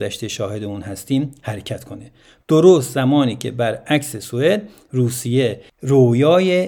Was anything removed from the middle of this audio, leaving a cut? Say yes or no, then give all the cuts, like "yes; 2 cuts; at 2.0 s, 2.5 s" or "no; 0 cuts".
no; 0 cuts